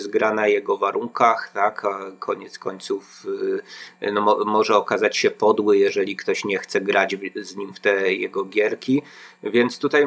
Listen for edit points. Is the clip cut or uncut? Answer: uncut